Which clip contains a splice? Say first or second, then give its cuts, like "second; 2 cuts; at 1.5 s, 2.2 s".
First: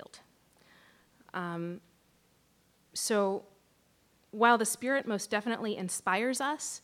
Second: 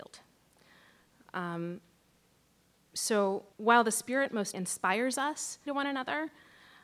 second; 3 cuts; at 3.5 s, 4.5 s, 5.7 s